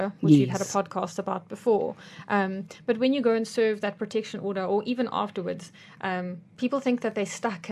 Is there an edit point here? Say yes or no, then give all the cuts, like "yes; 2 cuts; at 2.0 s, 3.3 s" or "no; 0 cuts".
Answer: no; 0 cuts